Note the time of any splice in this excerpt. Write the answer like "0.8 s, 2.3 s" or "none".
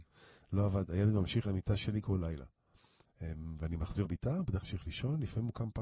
1.4 s, 2.0 s, 4.0 s, 4.6 s